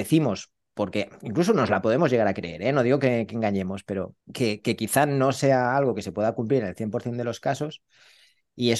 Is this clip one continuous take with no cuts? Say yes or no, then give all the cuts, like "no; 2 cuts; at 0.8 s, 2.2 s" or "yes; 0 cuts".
no; 1 cut; at 4.2 s